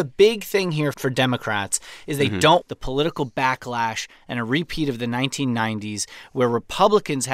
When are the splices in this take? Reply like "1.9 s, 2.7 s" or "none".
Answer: 0.9 s, 2.6 s